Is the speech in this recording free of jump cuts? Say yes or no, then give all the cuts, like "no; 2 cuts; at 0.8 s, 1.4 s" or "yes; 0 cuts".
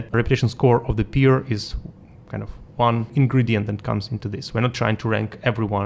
yes; 0 cuts